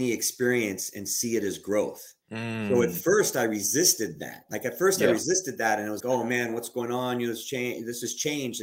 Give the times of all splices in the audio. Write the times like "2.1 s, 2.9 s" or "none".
2.2 s, 6.0 s